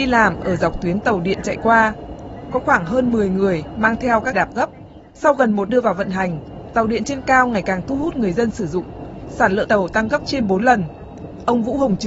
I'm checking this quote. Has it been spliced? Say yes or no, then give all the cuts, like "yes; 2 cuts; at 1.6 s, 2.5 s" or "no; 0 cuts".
yes; 4 cuts; at 4.3 s, 5.1 s, 5.7 s, 9.6 s